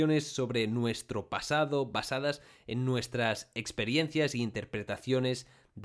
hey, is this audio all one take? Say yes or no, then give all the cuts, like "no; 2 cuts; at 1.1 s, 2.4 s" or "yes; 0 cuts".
yes; 0 cuts